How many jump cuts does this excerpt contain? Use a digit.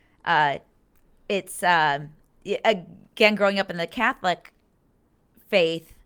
0